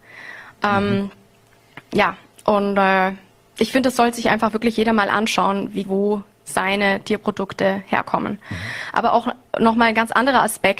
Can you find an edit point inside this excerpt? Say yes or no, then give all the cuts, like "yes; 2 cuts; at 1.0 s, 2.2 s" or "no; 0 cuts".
yes; 1 cut; at 5.8 s